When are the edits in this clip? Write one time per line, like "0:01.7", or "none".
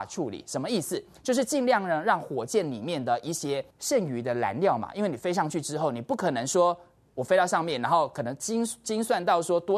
0:03.7